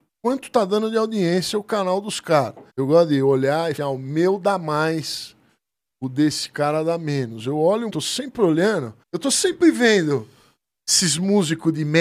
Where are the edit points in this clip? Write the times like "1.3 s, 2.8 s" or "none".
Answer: 2.7 s, 3.8 s, 7.9 s, 9.0 s